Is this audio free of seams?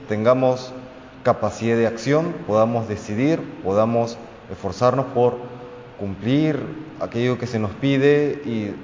yes; 0 cuts

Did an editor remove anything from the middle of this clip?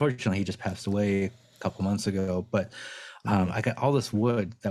no; 0 cuts

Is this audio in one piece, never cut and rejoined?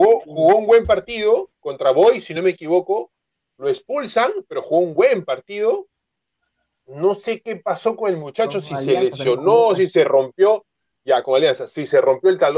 yes; 0 cuts

